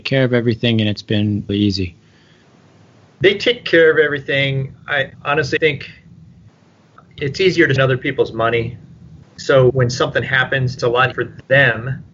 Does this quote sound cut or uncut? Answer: cut